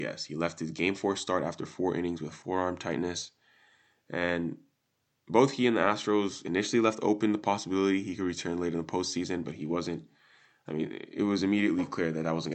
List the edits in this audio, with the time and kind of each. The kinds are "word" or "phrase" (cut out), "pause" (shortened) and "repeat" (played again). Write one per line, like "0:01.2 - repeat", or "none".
none

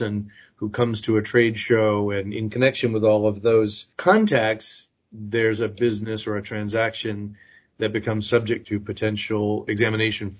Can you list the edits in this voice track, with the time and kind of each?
none

